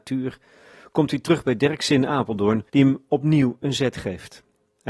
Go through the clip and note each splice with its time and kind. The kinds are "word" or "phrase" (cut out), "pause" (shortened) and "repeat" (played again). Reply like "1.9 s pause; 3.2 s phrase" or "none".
2.7 s pause